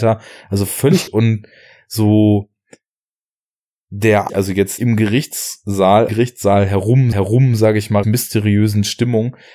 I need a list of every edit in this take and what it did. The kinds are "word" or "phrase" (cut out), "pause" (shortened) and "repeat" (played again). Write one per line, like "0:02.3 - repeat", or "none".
0:01.1 - word
0:04.3 - word
0:04.8 - word
0:06.1 - phrase
0:07.1 - repeat
0:08.0 - word